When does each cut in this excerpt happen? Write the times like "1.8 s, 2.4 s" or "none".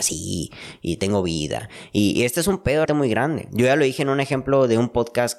2.9 s

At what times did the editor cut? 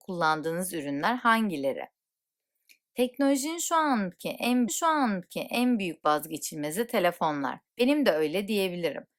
4.7 s, 7.7 s

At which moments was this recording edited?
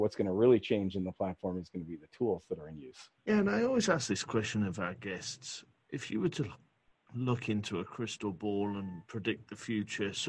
3.2 s

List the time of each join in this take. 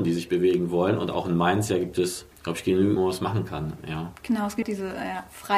2.3 s, 3.0 s, 4.2 s, 4.6 s

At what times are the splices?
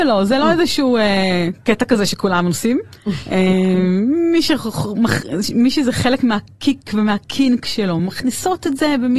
none

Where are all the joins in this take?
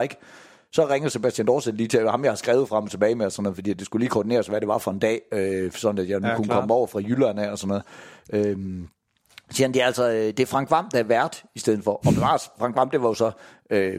none

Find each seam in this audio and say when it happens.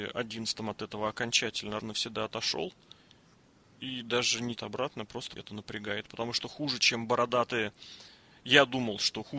1.8 s, 4.6 s, 5.4 s

